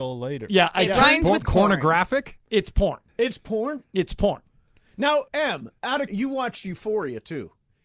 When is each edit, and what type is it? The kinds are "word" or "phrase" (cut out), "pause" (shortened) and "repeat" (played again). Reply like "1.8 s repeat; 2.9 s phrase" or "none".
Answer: 3.1 s pause; 5.3 s word; 6.1 s word